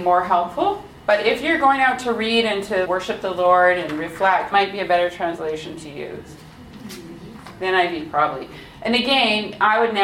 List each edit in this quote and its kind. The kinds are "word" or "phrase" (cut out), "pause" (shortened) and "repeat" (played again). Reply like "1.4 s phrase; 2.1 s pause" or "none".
2.8 s word; 4.5 s word